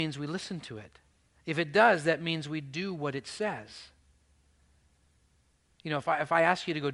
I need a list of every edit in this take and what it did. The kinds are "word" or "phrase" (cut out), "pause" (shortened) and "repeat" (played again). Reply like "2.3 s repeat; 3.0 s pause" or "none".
none

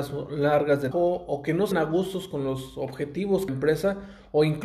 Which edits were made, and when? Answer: 0.9 s word; 1.7 s word; 3.5 s phrase

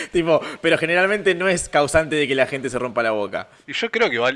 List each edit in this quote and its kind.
none

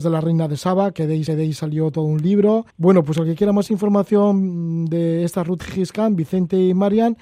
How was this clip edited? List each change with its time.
1.3 s repeat; 2.7 s pause; 5.6 s word

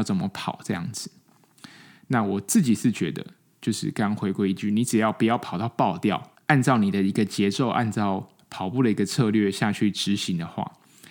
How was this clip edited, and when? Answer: none

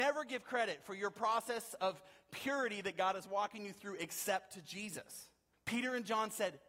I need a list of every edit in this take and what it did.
5.5 s pause

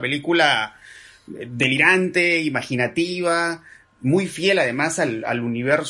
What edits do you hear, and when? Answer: none

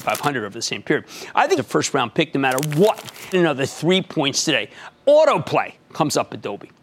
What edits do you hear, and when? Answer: 1.6 s word; 3.3 s phrase

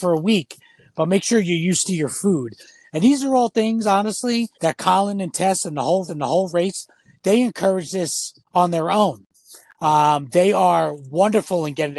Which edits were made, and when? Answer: 4.5 s pause; 6.1 s repeat; 8.5 s pause

